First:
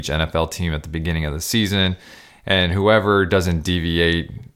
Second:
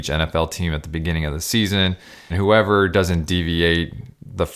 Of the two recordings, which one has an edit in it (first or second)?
second